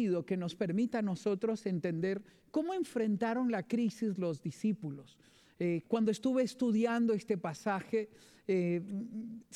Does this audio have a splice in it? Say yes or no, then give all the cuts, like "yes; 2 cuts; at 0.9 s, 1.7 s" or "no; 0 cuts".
no; 0 cuts